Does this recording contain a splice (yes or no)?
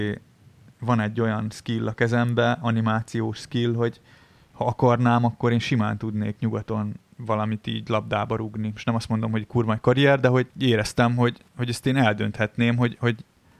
yes